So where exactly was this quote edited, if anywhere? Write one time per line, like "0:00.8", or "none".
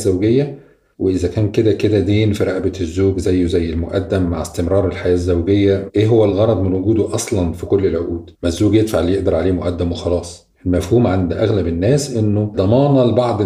0:08.4
0:10.5